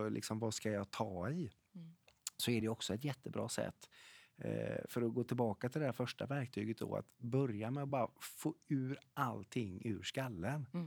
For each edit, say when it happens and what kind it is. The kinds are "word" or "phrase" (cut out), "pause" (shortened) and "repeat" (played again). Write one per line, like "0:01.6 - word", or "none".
none

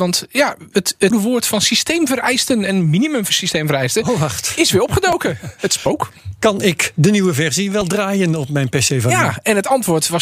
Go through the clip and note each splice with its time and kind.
0:01.1 - word

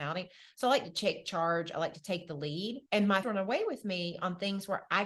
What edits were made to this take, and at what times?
0:02.9 - pause
0:03.2 - word

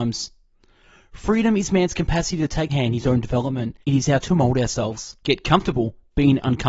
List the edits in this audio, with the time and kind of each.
0:02.7 - word
0:03.8 - pause
0:04.2 - word
0:05.2 - pause

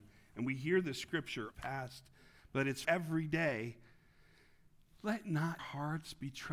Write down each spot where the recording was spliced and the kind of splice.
0:01.5 - phrase
0:02.8 - word
0:05.6 - word

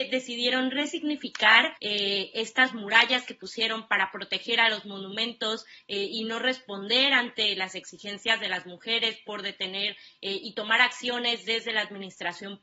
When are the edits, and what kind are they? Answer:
0:01.8 - pause

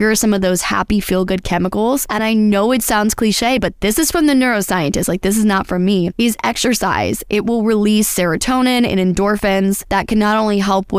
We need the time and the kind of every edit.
none

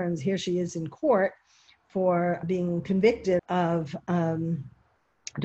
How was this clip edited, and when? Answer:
0:02.4 - word
0:03.4 - word

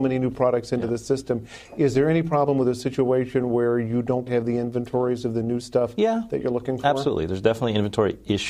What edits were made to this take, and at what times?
0:04.3 - word

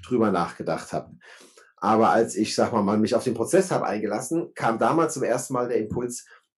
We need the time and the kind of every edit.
none

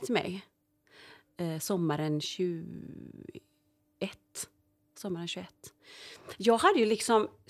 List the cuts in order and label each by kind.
none

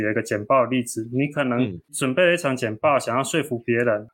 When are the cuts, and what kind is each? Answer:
0:01.8 - pause

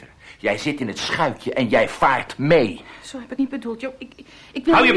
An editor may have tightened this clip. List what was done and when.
0:03.4 - word

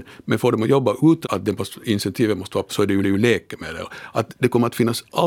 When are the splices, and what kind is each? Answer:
0:01.2 - word
0:02.7 - word
0:03.0 - repeat

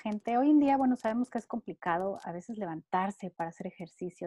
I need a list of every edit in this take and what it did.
none

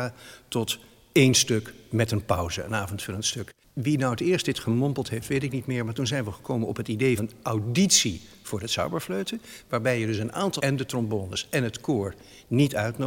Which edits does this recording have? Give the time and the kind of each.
0:07.2 - word
0:10.6 - word

